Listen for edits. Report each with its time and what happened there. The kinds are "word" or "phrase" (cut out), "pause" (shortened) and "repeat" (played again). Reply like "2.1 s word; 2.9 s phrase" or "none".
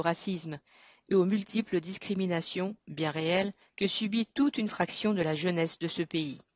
3.6 s pause

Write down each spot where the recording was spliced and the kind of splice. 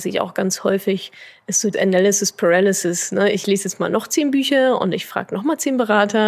1.7 s word

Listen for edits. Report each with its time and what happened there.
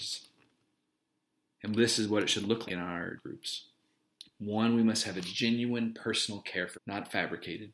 2.7 s word; 3.2 s word; 6.7 s word

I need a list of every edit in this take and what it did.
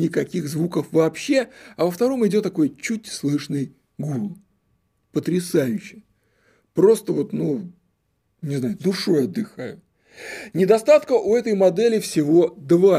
none

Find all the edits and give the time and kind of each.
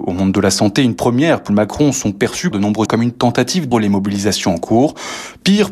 1.5 s word; 2.5 s word; 2.9 s word; 3.7 s word

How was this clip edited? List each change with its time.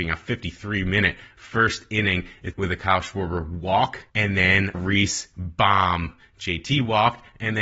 2.5 s word; 4.1 s pause; 4.7 s word

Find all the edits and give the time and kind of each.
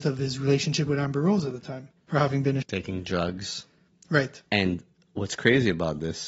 2.0 s pause; 2.6 s word; 4.5 s pause

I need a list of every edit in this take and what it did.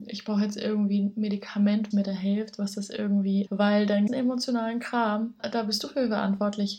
1.9 s word; 3.5 s word; 4.1 s word; 5.4 s word

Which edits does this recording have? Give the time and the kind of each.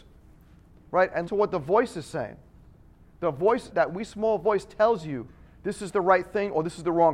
1.3 s word; 3.7 s word

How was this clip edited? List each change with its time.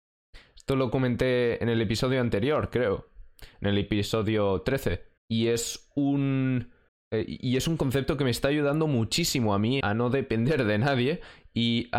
5.2 s pause; 6.9 s pause; 9.8 s word

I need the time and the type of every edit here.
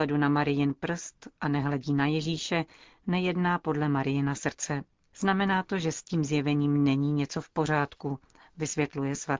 none

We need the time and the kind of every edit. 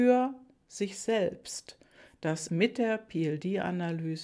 2.5 s word

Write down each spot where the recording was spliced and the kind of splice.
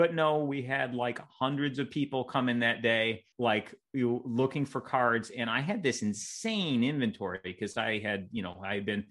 3.3 s pause

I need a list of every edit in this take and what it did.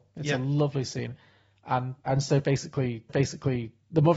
2.0 s word; 3.1 s repeat

